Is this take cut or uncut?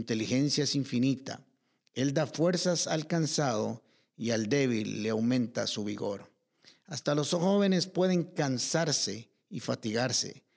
uncut